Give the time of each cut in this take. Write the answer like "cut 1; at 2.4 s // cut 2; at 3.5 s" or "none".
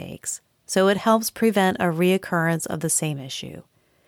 none